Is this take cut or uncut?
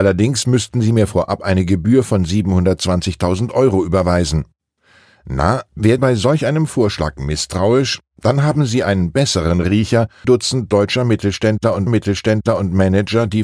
cut